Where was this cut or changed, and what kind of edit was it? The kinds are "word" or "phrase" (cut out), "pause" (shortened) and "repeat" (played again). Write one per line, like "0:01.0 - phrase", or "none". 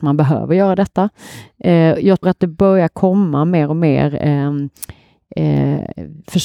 0:02.2 - word